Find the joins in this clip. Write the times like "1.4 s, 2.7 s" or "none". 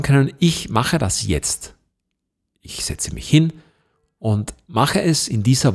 none